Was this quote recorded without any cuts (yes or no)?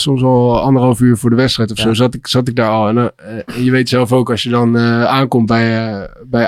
yes